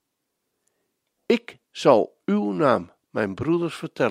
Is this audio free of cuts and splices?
yes; 0 cuts

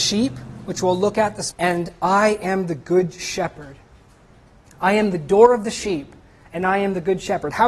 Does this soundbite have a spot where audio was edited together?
yes; 1 cut; at 1.5 s

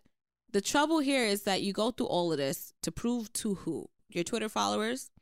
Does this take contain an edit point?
no; 0 cuts

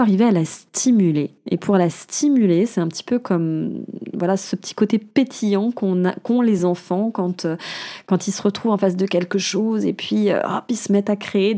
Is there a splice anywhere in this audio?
no; 0 cuts

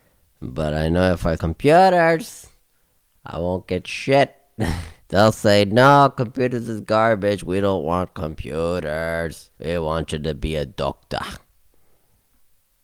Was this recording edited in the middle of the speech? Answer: yes; 3 cuts; at 1.4 s, 5.0 s, 9.5 s

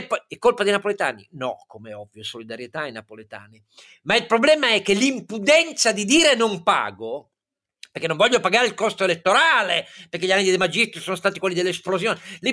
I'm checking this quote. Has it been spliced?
no; 0 cuts

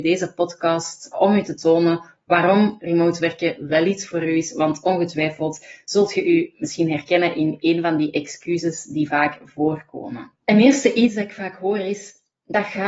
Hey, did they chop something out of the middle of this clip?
yes; 2 cuts; at 1.1 s, 10.4 s

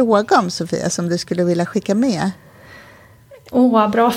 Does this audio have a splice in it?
no; 0 cuts

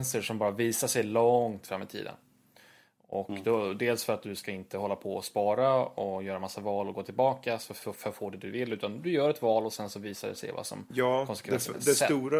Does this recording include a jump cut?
no; 0 cuts

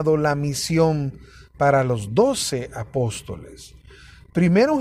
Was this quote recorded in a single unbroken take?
yes; 0 cuts

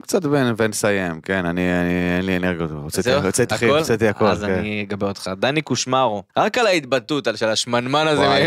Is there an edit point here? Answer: yes; 2 cuts; at 3.5 s, 6.3 s

